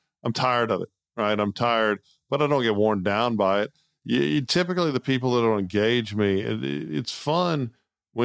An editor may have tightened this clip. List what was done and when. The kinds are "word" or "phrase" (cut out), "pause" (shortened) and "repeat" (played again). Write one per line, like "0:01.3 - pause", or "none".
none

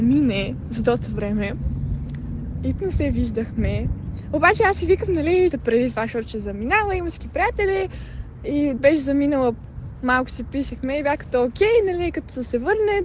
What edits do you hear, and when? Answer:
0:02.8 - word
0:05.5 - phrase
0:07.2 - word
0:08.8 - word

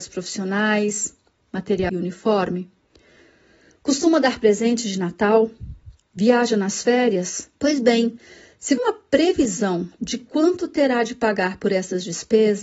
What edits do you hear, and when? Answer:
0:01.9 - phrase
0:07.5 - pause
0:08.8 - phrase

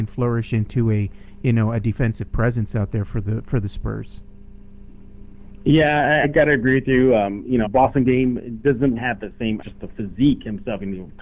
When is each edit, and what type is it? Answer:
0:06.2 - word
0:07.6 - word
0:09.0 - word
0:09.6 - word

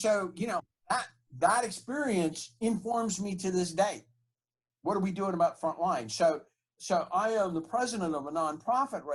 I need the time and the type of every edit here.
none

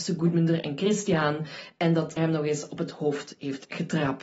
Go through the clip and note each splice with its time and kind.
0:02.2 - word

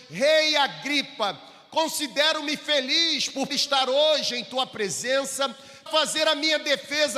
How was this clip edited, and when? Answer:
0:03.5 - word
0:05.9 - word

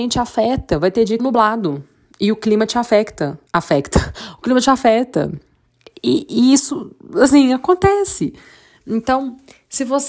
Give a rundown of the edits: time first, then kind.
0:01.2 - phrase
0:03.5 - pause

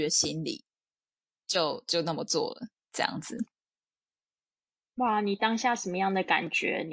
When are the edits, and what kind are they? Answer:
none

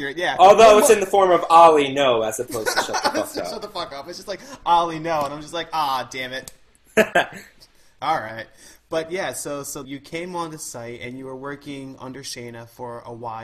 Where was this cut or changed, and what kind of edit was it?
0:09.8 - word

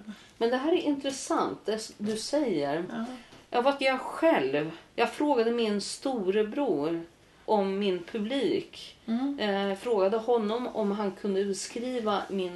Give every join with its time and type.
0:03.8 - word
0:04.9 - pause
0:07.5 - word

